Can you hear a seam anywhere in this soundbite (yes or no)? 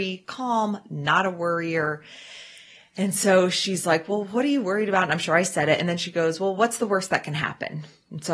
no